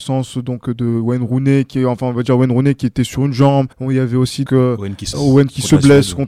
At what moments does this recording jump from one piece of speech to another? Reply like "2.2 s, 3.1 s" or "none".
3.7 s, 4.5 s, 5.1 s